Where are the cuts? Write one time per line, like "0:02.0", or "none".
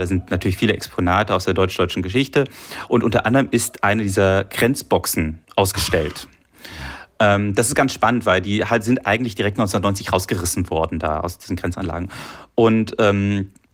0:05.4